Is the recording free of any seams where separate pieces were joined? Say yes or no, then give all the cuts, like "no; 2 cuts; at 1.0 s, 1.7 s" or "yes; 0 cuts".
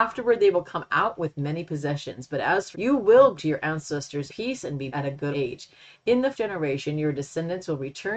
no; 6 cuts; at 2.7 s, 3.4 s, 4.3 s, 4.9 s, 5.3 s, 6.3 s